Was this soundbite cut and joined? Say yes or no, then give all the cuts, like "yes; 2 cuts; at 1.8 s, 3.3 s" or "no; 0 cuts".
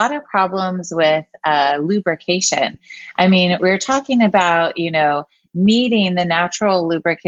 no; 0 cuts